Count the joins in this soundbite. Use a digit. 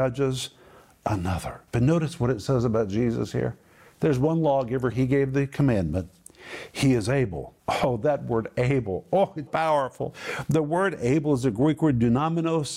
4